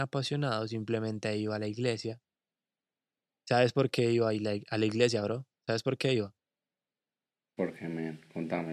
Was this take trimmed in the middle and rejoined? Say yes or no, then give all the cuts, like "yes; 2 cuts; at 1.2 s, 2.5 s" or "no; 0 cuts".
no; 0 cuts